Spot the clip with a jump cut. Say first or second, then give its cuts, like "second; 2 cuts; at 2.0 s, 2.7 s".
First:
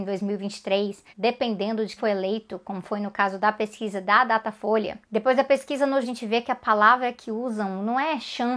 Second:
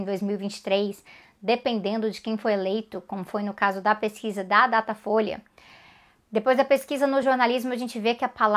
first; 4 cuts; at 1.1 s, 2.0 s, 5.0 s, 6.0 s